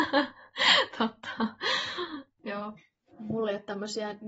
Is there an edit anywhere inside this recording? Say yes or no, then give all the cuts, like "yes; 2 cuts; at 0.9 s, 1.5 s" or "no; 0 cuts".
no; 0 cuts